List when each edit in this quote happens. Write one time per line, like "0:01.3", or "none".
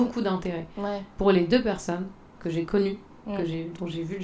0:02.2